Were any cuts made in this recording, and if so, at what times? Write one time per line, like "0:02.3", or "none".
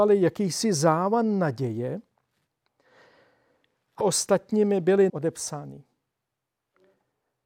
0:04.0
0:05.1